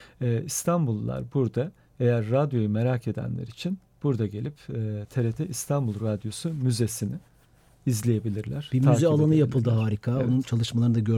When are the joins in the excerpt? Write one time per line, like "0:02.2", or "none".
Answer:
none